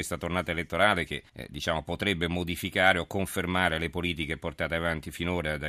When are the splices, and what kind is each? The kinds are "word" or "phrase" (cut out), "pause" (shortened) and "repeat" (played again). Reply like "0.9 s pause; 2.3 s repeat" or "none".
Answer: 1.3 s pause